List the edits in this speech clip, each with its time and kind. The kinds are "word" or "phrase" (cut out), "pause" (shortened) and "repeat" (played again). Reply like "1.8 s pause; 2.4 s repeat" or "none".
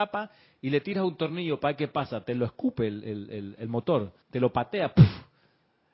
4.2 s pause